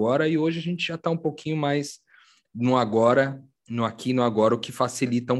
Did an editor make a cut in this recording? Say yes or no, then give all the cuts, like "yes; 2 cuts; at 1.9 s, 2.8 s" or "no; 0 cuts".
no; 0 cuts